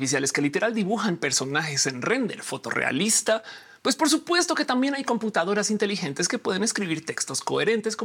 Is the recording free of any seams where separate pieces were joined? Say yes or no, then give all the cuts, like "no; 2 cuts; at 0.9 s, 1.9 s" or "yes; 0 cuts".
yes; 0 cuts